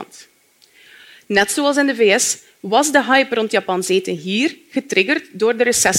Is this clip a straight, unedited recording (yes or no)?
yes